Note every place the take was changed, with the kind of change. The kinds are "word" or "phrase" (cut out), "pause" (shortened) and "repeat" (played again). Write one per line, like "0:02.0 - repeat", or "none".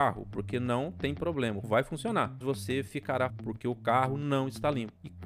0:01.6 - word
0:02.4 - word
0:03.3 - word

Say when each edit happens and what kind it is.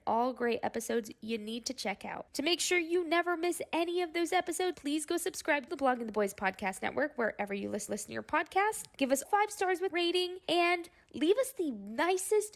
0:04.7 - phrase
0:05.7 - word
0:07.9 - repeat
0:09.2 - word
0:09.9 - word

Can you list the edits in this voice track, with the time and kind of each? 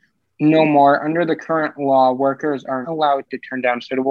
0:02.8 - word

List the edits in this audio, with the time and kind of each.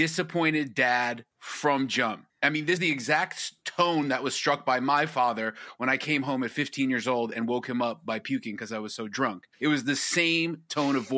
0:01.3 - pause
0:02.3 - pause
0:02.8 - word
0:09.5 - pause

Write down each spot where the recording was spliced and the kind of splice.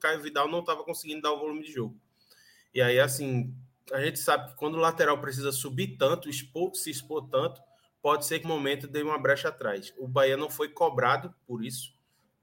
0:08.4 - phrase

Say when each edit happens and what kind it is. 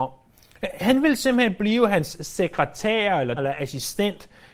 0:03.4 - word

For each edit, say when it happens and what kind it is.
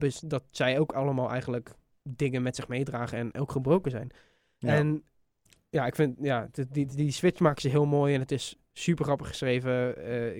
none

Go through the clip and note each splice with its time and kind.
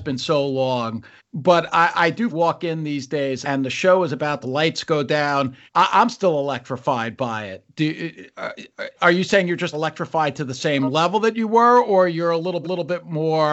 0:01.2 - pause
0:02.3 - phrase
0:03.4 - word
0:04.4 - phrase
0:05.7 - pause
0:09.7 - word
0:12.6 - repeat

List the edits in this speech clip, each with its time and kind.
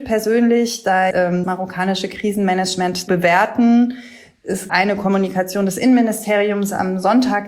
0:01.1 - word
0:01.4 - word
0:03.1 - word
0:04.7 - word

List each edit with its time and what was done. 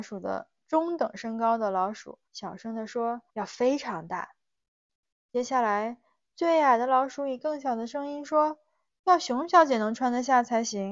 0:02.3 - pause
0:03.3 - pause

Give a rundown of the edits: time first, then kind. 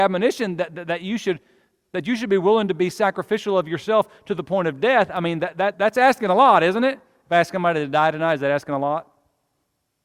0:05.7 - word

